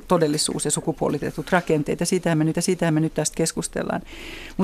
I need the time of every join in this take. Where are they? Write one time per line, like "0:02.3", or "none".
0:02.5

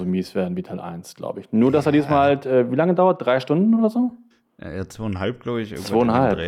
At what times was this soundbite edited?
none

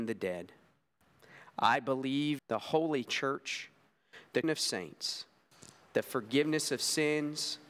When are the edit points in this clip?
0:02.4
0:03.1
0:04.4

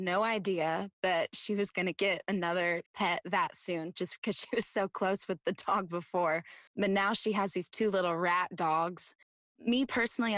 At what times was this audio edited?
none

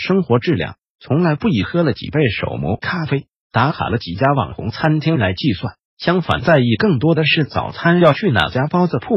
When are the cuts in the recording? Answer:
0:05.9

